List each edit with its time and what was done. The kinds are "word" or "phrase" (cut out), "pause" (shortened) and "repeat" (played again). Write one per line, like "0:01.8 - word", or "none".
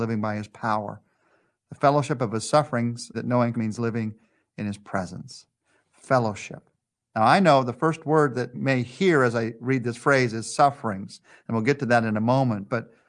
0:03.1 - phrase
0:03.5 - word
0:08.5 - word